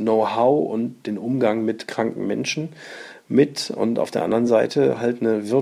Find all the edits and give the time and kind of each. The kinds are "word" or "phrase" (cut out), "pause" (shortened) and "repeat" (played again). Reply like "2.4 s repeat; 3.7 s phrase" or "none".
none